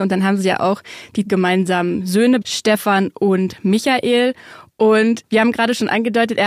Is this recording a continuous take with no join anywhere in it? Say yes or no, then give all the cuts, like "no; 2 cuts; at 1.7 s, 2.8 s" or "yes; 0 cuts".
no; 2 cuts; at 1.3 s, 2.4 s